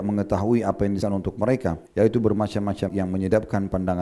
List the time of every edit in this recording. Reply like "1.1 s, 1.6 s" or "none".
1.0 s, 1.9 s, 2.9 s

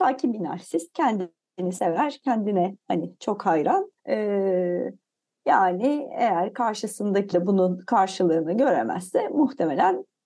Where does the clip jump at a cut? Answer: 4.0 s, 7.3 s

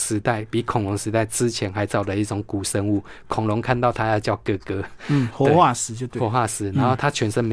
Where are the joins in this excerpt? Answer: none

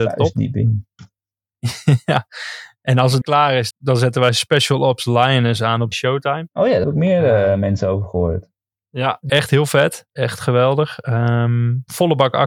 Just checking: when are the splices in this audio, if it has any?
3.2 s, 3.7 s, 5.9 s, 6.8 s, 8.7 s, 9.3 s, 10.1 s

